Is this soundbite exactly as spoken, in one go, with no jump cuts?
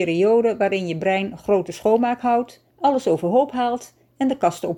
no; 1 cut; at 2.7 s

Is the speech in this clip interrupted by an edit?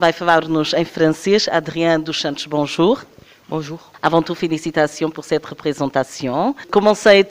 no; 0 cuts

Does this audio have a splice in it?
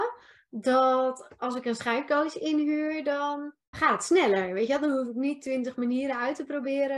yes; 1 cut; at 3.7 s

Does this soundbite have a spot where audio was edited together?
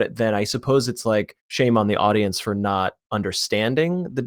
yes; 1 cut; at 1.4 s

